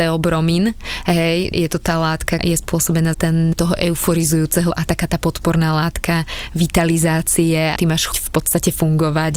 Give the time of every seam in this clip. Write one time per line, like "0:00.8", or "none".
0:01.5
0:02.4
0:03.1
0:03.5
0:04.7
0:07.8
0:08.1